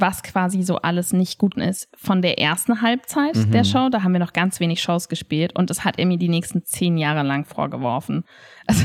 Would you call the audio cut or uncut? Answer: cut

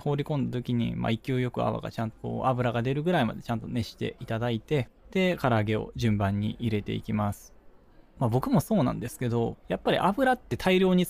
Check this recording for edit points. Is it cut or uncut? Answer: cut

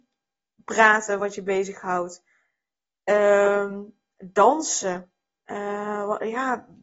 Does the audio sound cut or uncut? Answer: uncut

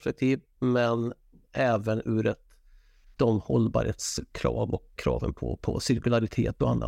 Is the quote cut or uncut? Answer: cut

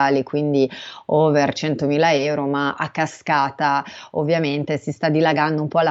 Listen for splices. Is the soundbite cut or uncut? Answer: uncut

